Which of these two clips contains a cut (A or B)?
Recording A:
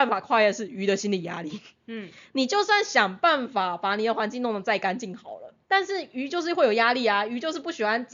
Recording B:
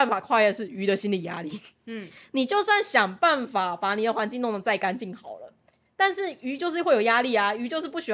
A